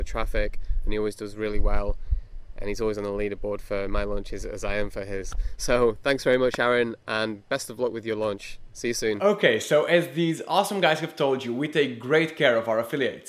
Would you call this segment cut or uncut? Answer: uncut